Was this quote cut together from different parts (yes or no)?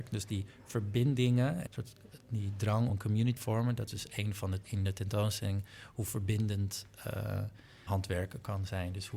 yes